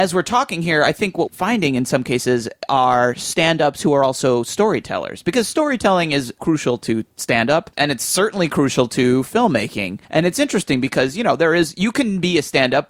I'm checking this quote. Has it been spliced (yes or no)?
yes